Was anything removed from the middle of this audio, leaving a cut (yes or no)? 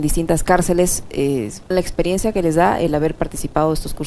yes